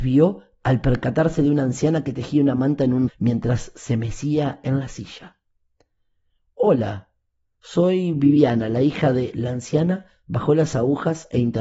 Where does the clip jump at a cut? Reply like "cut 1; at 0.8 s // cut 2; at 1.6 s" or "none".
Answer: cut 1; at 3.1 s